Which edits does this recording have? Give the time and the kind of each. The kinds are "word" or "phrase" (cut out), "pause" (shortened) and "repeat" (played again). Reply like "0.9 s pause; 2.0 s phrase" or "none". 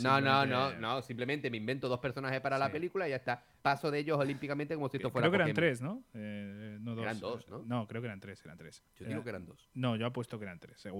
8.9 s pause